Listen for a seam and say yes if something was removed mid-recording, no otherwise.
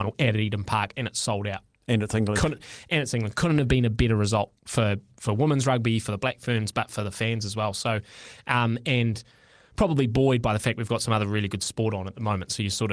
no